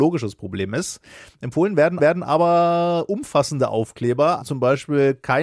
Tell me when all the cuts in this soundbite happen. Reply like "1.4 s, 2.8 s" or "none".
2.0 s, 4.4 s